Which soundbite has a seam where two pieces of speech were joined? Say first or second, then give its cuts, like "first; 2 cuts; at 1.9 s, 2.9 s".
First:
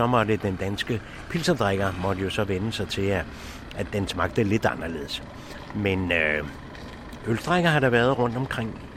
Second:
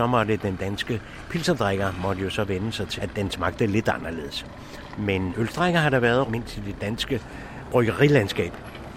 second; 3 cuts; at 3.0 s, 5.3 s, 6.3 s